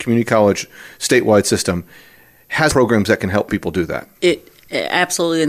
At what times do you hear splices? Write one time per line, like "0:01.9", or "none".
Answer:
0:02.7
0:04.1